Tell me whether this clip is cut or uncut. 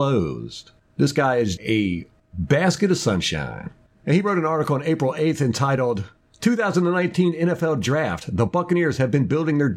cut